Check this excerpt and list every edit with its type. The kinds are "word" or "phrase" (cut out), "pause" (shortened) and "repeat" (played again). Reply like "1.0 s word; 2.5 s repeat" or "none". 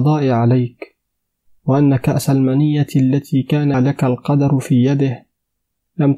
3.7 s word